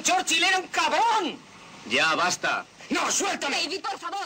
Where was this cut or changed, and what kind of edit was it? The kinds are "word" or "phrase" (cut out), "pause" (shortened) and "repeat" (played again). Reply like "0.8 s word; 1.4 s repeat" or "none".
none